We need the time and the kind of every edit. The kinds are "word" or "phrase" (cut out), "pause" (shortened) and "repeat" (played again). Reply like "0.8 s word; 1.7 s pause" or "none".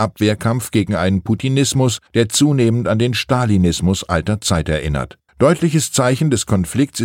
2.1 s pause; 5.3 s pause

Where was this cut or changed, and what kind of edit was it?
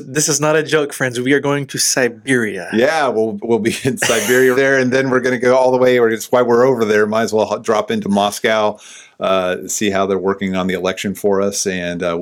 4.5 s word

